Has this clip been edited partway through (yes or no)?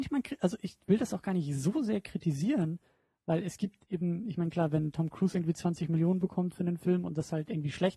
no